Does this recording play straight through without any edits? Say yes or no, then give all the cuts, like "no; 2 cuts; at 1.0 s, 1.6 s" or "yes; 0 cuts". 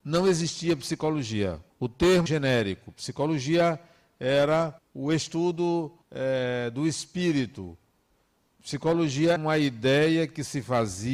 no; 5 cuts; at 1.7 s, 2.3 s, 4.8 s, 6.0 s, 9.4 s